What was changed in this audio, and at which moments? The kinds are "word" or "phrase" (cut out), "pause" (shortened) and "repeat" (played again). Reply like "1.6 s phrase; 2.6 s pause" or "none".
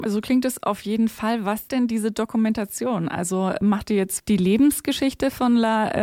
1.7 s word; 4.2 s word

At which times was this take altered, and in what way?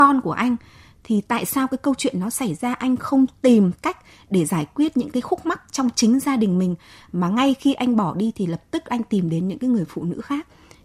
none

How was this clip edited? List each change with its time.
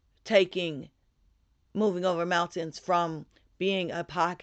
none

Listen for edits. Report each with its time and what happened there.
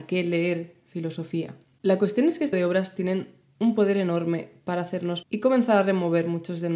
2.5 s word; 5.2 s word

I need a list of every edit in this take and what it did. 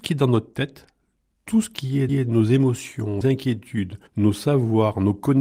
2.1 s repeat; 3.2 s phrase; 4.1 s pause

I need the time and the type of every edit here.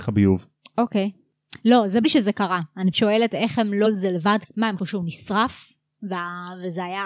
2.0 s word; 2.9 s word; 3.9 s word; 4.4 s word; 4.8 s word

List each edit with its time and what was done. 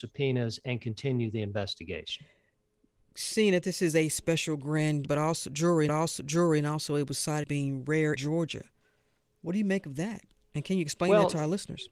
5.0 s word; 5.9 s repeat; 7.4 s word; 8.2 s word

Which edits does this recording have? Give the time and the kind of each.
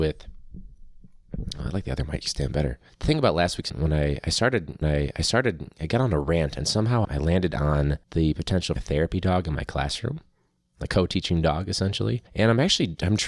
2.9 s pause; 3.7 s word; 4.8 s repeat; 7.0 s word; 8.0 s pause; 8.8 s phrase; 10.9 s word; 12.3 s pause

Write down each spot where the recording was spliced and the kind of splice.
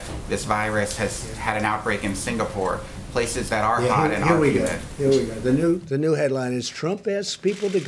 none

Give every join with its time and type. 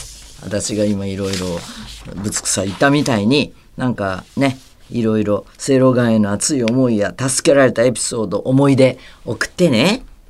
4.3 s pause

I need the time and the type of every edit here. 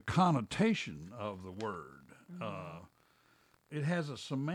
none

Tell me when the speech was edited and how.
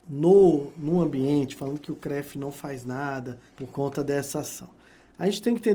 3.5 s pause

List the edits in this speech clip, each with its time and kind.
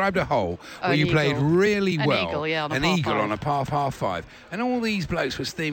3.7 s repeat

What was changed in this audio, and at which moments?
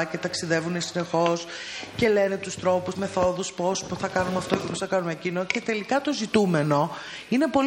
2.9 s word

